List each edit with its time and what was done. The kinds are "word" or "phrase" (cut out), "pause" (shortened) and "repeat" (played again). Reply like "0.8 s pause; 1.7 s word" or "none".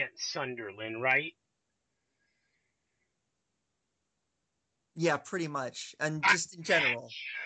none